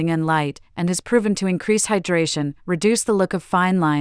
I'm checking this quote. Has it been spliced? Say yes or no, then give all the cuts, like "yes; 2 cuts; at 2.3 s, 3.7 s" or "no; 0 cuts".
no; 0 cuts